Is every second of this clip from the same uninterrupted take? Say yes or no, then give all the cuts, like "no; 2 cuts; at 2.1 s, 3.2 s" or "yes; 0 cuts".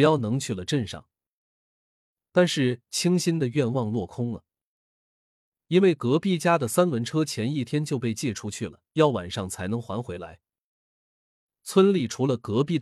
no; 1 cut; at 8.9 s